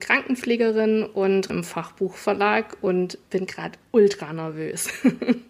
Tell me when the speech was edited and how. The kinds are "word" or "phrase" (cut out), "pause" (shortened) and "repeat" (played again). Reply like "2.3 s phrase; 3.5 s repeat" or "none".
1.5 s word